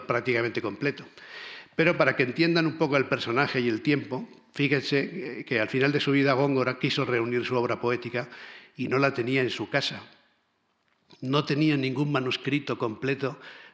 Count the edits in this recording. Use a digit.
0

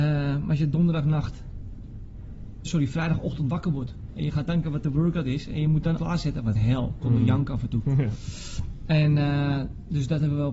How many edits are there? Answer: 4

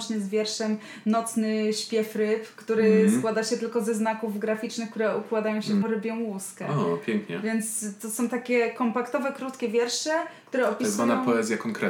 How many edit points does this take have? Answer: 1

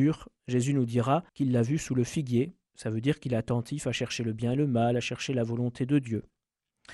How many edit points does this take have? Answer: 1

